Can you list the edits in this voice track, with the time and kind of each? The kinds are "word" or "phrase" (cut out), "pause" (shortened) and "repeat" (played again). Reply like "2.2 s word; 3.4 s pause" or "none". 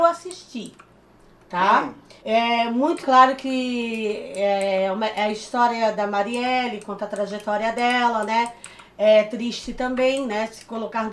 2.2 s pause; 3.0 s word